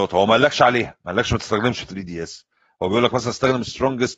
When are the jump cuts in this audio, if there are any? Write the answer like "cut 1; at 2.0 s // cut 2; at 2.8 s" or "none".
none